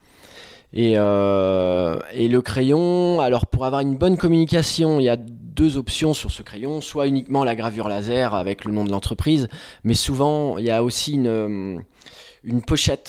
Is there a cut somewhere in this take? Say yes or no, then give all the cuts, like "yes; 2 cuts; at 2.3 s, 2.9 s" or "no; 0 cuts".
no; 0 cuts